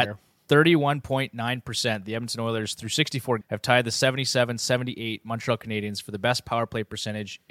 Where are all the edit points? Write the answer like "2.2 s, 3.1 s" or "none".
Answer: 3.4 s